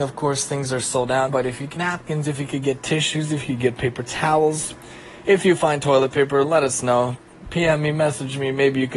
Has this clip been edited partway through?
yes; 2 cuts; at 1.3 s, 1.8 s

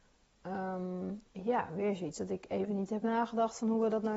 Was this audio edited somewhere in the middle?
no; 0 cuts

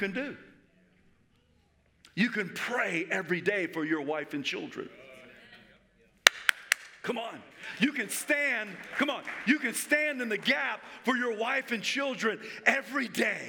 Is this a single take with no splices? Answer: yes; 0 cuts

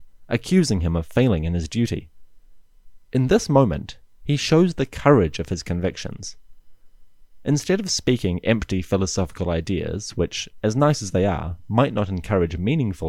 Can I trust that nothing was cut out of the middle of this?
yes; 0 cuts

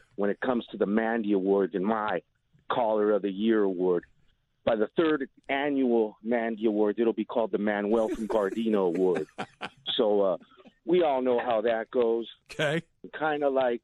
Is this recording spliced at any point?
no; 0 cuts

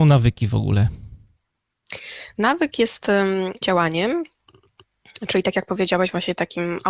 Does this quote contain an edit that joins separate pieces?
yes; 1 cut; at 3.6 s

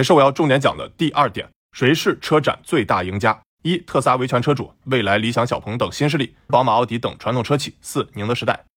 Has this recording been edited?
yes; 3 cuts; at 3.5 s, 4.8 s, 6.5 s

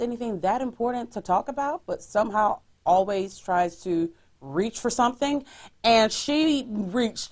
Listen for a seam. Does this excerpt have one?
no; 0 cuts

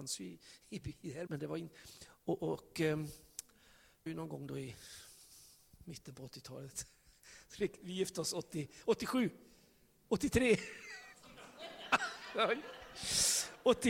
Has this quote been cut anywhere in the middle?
yes; 3 cuts; at 1.3 s, 2.4 s, 4.1 s

